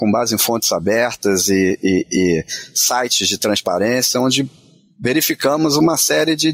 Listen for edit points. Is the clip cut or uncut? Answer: uncut